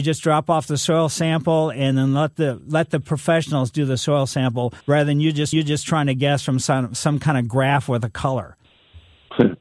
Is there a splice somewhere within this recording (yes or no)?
yes